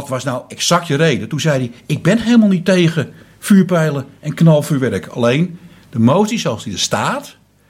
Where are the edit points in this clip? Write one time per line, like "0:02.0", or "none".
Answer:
none

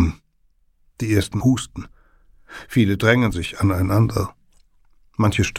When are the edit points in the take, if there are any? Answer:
0:01.4
0:03.3

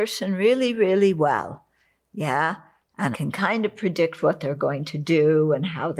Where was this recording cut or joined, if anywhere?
0:03.1

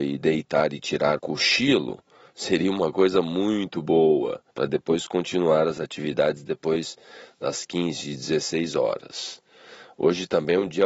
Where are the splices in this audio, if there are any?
0:01.2
0:04.5

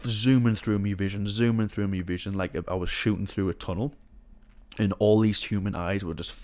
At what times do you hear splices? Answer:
none

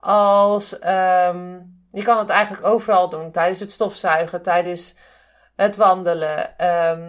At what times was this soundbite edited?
none

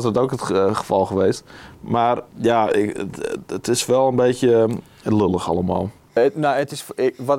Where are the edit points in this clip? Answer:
0:02.3

